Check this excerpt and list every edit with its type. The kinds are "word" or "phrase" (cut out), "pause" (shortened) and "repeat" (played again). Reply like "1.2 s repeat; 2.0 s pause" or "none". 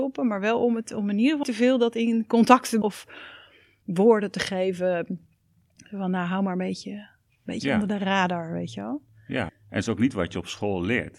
1.4 s word; 2.8 s word; 9.5 s word